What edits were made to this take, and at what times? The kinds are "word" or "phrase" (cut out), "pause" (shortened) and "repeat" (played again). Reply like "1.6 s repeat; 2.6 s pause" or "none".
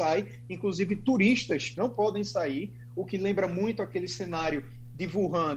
1.8 s phrase